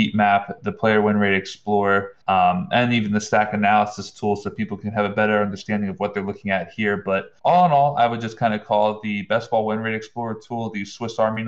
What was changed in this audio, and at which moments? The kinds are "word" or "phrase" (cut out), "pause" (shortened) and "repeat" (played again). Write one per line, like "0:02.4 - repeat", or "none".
0:02.2 - pause
0:07.4 - pause